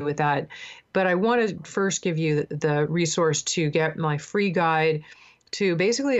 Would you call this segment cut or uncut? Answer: uncut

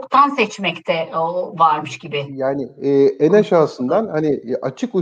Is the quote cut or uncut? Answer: uncut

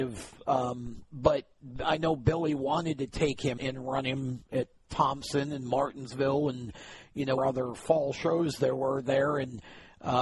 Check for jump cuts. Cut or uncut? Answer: cut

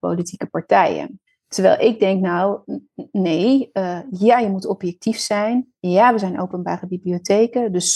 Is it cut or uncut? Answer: uncut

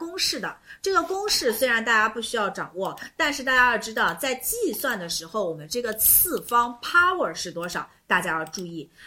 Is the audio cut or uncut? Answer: uncut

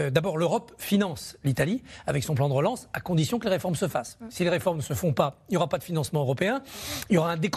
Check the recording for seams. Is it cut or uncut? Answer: uncut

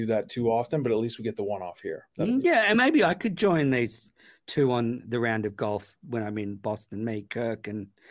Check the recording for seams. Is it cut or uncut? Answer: uncut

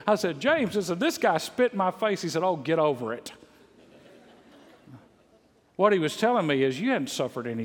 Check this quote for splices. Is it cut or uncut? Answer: uncut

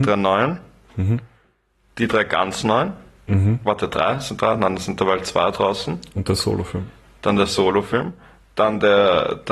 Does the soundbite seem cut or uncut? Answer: cut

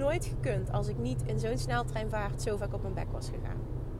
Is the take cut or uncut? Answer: uncut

